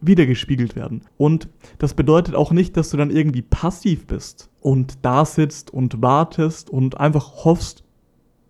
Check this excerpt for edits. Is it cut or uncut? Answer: cut